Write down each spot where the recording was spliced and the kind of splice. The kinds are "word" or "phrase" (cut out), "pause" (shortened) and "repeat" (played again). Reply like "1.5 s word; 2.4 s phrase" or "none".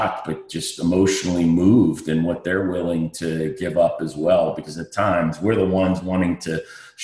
none